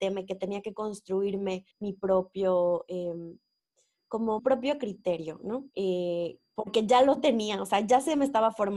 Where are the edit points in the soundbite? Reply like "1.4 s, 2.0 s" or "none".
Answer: 1.7 s, 4.4 s, 5.7 s